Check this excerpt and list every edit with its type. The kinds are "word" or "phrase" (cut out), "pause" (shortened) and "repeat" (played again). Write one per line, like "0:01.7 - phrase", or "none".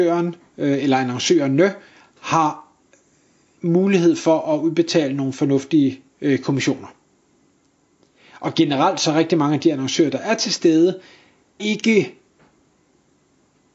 0:11.6 - word